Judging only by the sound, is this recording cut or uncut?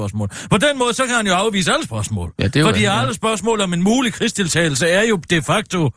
uncut